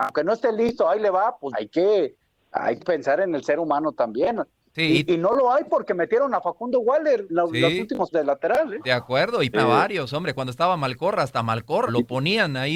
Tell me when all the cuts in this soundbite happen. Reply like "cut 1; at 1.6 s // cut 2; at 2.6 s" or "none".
cut 1; at 1.5 s // cut 2; at 2.8 s // cut 3; at 7.3 s // cut 4; at 8.1 s // cut 5; at 9.5 s // cut 6; at 11.9 s